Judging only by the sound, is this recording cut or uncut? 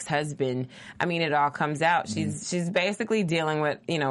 uncut